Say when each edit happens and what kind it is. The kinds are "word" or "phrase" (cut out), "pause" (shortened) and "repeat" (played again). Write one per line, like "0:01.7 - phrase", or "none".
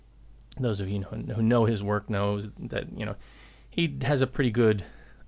none